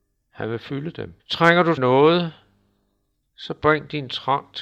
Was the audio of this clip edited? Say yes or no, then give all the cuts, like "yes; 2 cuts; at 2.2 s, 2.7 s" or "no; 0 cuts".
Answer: yes; 2 cuts; at 1.2 s, 1.8 s